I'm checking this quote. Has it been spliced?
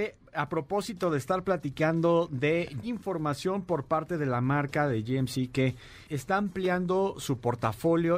yes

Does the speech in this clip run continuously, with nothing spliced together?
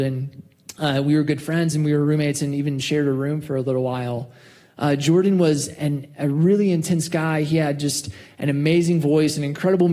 yes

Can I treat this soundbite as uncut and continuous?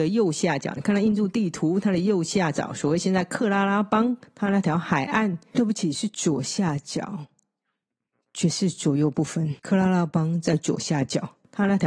no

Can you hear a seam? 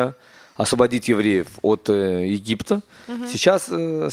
no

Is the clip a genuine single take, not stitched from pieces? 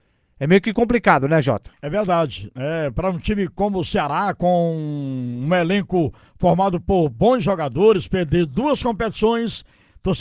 no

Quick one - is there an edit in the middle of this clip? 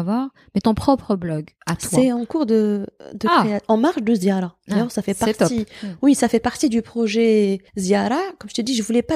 yes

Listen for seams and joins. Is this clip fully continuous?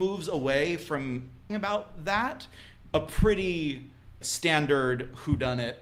no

